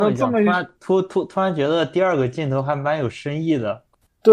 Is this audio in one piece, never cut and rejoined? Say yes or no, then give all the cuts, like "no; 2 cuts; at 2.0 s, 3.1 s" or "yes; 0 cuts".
yes; 0 cuts